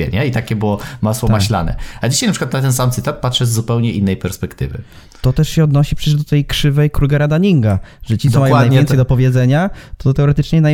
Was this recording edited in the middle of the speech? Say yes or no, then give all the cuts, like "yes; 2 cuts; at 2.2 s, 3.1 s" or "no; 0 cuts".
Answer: no; 0 cuts